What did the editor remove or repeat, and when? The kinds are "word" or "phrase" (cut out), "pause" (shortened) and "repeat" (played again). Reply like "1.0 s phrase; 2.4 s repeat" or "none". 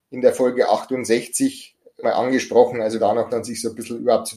2.0 s word; 3.0 s word; 3.3 s word